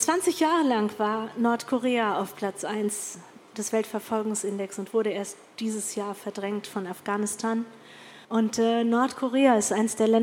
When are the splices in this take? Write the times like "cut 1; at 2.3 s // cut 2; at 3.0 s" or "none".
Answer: cut 1; at 8.2 s